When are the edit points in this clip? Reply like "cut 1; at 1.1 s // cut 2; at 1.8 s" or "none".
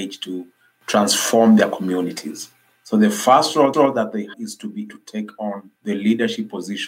cut 1; at 3.7 s // cut 2; at 4.3 s // cut 3; at 4.9 s // cut 4; at 5.8 s